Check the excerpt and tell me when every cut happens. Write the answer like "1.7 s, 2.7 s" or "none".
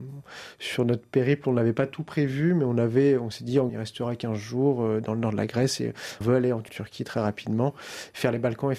3.7 s, 6.2 s